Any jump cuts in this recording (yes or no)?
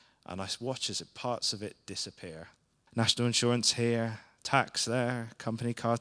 no